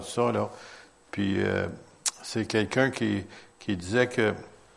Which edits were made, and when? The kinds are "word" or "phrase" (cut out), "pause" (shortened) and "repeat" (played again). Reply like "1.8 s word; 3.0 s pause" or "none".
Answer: none